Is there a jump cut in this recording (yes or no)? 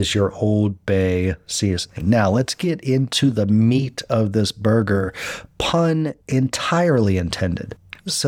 yes